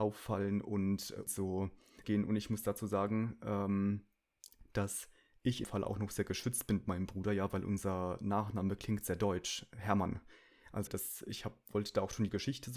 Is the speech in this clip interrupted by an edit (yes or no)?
yes